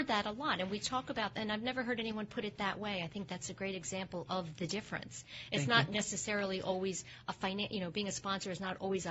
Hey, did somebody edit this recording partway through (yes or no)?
no